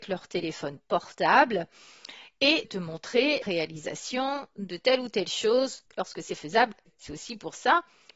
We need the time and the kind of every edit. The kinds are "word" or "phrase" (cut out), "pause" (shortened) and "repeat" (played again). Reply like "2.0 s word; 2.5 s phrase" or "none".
2.6 s word; 3.4 s word; 6.9 s word